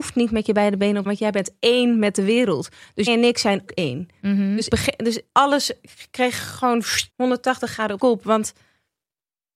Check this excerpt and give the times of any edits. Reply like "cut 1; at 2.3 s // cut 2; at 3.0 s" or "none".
cut 1; at 1.1 s // cut 2; at 3.1 s // cut 3; at 3.7 s // cut 4; at 4.7 s // cut 5; at 5.3 s // cut 6; at 7.1 s // cut 7; at 8.0 s